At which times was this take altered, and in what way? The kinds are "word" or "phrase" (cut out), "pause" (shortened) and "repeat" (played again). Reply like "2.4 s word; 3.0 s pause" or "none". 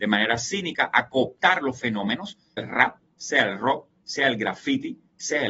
2.6 s word